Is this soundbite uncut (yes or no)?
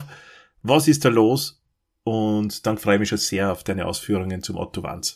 yes